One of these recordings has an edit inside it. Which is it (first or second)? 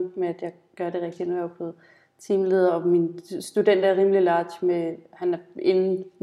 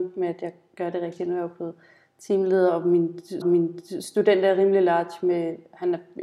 second